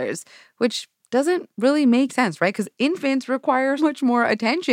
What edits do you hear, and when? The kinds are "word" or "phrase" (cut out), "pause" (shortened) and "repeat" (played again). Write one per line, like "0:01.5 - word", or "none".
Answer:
0:02.1 - word
0:03.8 - word